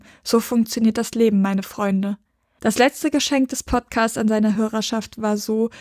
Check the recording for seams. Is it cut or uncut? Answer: uncut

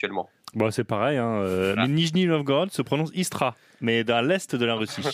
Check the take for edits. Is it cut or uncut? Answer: uncut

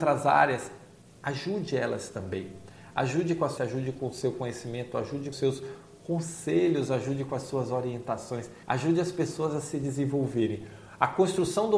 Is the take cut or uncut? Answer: cut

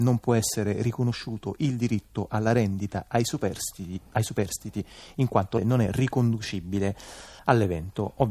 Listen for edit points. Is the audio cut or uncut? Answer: cut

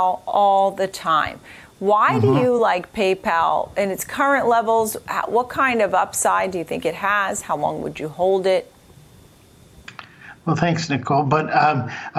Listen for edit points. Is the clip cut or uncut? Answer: uncut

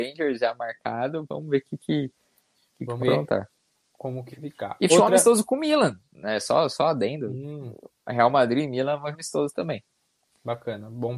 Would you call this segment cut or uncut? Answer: cut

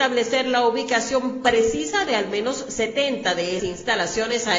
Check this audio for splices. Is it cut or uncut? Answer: cut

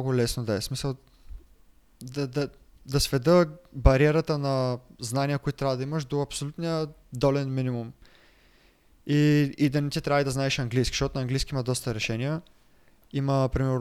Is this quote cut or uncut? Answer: uncut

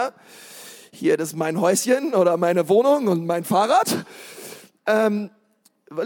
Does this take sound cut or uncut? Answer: uncut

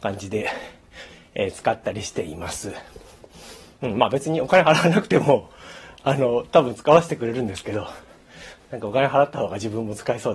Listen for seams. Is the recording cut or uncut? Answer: uncut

